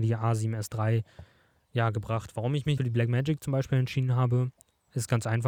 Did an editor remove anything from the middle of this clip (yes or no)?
yes